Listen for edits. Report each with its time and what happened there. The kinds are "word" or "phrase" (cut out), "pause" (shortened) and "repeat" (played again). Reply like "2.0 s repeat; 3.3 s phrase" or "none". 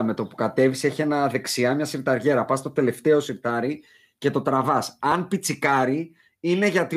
none